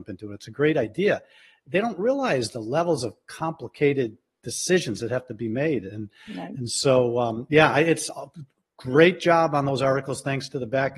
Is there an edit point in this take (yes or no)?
no